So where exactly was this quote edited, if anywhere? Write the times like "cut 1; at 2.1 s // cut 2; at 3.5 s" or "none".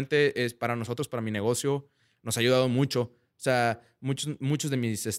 none